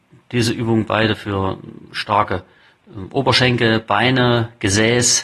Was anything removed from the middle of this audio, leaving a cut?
no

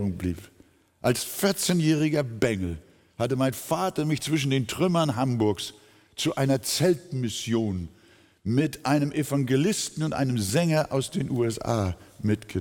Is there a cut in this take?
no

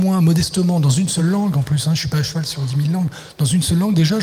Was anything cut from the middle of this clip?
no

